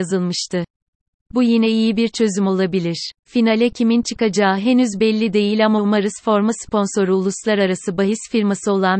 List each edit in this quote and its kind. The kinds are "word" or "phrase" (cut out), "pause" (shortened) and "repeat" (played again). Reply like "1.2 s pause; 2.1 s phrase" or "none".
3.2 s pause